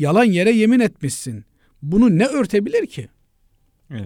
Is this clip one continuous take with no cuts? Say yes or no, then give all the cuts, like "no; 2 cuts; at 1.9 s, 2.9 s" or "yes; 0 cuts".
yes; 0 cuts